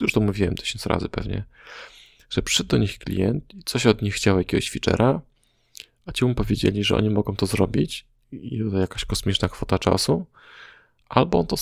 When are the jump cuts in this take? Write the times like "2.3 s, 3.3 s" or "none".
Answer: none